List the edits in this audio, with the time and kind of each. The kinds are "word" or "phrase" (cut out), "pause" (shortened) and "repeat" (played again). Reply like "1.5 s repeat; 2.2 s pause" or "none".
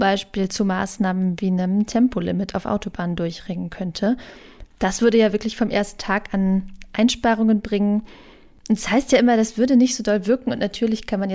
none